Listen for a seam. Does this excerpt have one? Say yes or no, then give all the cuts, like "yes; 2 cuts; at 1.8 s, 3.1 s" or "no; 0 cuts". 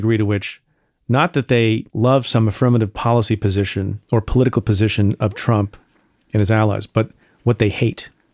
yes; 2 cuts; at 1.9 s, 4.0 s